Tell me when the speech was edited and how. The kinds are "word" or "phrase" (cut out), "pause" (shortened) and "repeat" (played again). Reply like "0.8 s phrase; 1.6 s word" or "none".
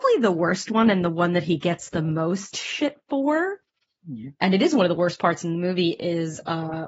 none